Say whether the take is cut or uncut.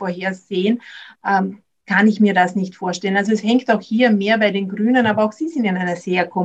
uncut